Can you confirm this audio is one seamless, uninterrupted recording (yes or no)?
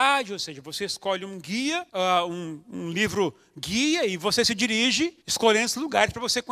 no